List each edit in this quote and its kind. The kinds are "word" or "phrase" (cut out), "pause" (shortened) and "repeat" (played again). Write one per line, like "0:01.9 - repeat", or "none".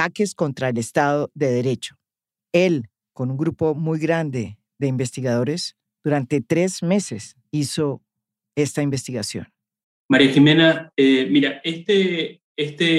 none

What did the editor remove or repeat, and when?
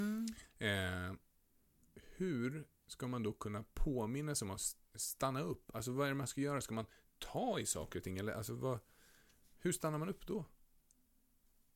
none

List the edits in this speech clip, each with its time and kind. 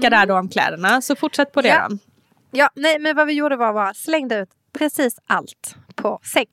none

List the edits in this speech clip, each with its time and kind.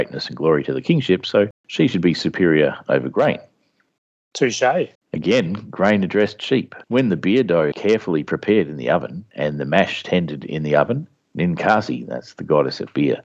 0:01.5 - pause
0:04.9 - pause
0:06.8 - pause
0:07.7 - phrase

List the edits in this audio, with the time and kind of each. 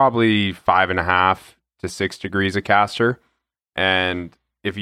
none

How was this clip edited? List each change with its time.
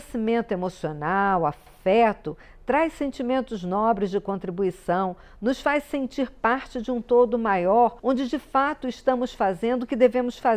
0:08.0 - pause

